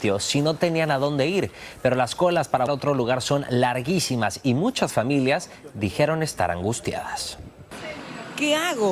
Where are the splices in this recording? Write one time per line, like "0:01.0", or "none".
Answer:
0:02.7